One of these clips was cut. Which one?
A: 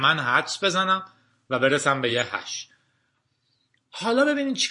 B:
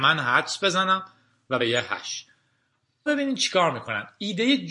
B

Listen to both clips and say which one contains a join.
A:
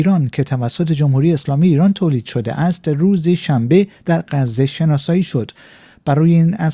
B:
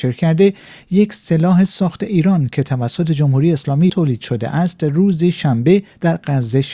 B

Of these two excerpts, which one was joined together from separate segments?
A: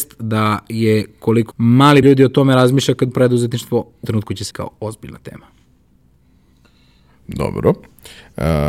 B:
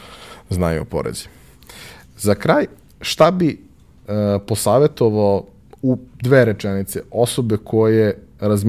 A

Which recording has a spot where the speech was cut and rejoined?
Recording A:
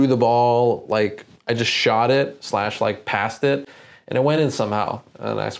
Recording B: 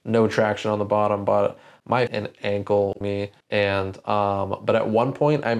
B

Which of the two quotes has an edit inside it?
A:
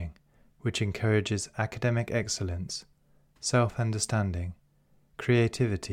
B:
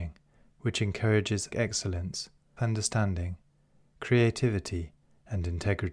B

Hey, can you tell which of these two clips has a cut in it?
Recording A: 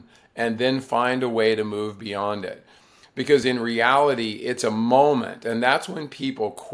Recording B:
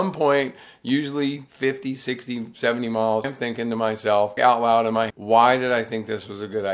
B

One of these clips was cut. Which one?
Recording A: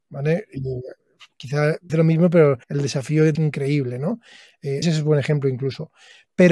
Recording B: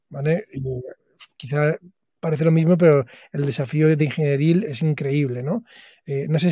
A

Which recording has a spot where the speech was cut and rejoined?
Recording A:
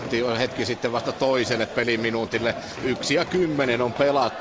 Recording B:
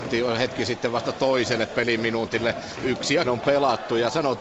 B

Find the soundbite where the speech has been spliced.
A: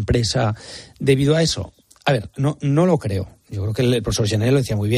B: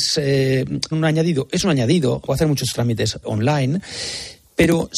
B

